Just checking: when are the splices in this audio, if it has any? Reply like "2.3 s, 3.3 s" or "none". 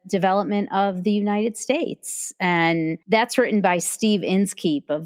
3.0 s